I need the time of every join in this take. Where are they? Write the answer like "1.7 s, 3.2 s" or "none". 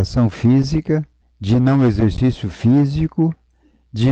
1.2 s